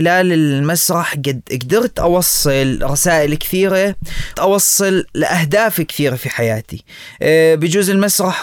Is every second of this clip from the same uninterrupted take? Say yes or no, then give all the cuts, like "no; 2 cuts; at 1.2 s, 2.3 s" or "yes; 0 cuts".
no; 1 cut; at 4.3 s